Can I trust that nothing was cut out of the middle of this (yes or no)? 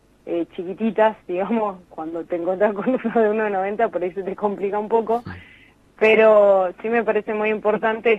yes